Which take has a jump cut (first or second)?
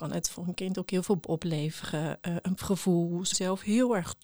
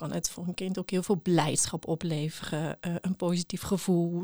first